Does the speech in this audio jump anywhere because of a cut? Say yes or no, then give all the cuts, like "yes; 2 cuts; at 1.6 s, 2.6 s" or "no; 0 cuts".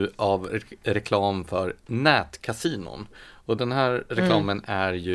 no; 0 cuts